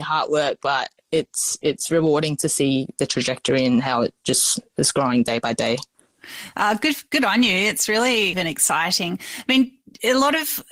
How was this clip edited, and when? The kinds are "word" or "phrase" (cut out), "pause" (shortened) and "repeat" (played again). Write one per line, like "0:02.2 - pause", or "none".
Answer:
0:01.0 - pause
0:08.3 - phrase